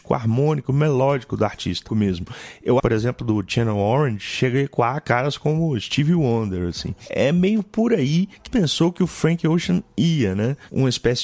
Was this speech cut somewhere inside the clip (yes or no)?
yes